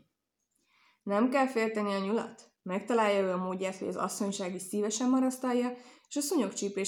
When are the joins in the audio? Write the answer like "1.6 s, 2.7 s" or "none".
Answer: none